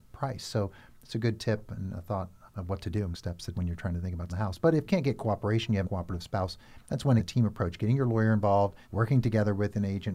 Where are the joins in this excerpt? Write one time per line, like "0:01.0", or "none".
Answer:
0:02.5
0:03.1
0:03.5
0:04.3
0:04.8
0:05.8
0:07.2
0:08.8